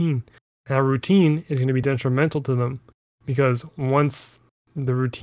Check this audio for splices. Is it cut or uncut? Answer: uncut